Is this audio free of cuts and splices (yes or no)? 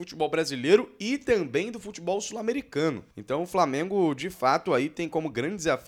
no